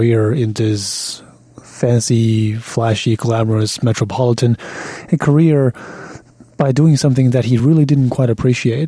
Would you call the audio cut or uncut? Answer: uncut